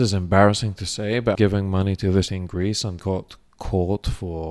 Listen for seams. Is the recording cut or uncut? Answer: cut